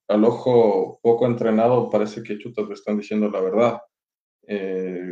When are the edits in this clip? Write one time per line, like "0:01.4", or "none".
none